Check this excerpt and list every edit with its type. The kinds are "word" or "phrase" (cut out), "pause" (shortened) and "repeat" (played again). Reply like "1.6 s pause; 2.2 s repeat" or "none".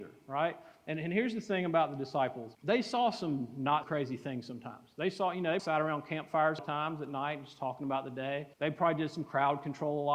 2.5 s pause; 3.8 s word; 5.6 s word; 6.6 s phrase; 8.5 s pause